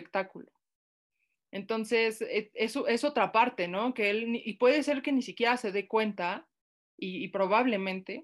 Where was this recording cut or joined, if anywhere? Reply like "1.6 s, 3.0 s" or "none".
none